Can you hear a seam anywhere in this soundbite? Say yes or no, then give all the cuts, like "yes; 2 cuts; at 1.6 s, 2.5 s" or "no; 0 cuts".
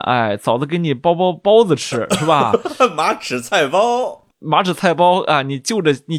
no; 0 cuts